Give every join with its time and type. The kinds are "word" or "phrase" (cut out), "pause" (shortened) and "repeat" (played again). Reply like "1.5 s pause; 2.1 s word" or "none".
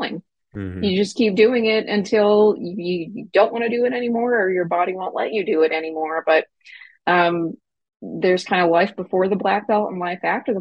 none